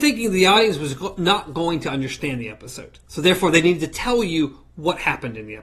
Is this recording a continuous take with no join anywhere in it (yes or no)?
no